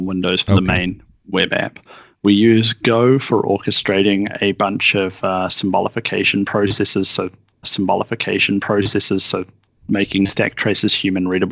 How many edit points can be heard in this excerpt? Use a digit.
2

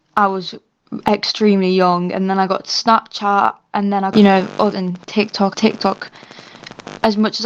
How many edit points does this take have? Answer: 3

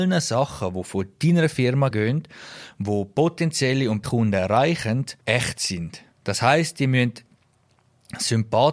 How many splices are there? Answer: 4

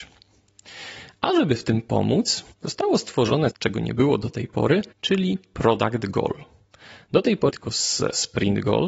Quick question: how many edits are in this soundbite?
4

